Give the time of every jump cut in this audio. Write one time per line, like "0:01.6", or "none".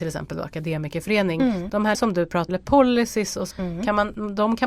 0:01.9
0:02.5
0:03.5